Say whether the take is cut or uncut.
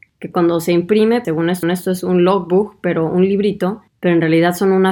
cut